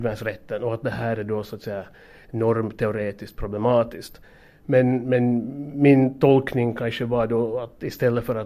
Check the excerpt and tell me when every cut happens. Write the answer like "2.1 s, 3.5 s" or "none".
none